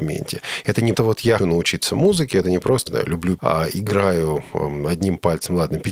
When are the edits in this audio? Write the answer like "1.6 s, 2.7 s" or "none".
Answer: 0.9 s, 1.4 s, 2.9 s, 3.4 s